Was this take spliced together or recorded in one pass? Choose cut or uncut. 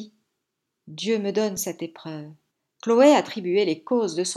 cut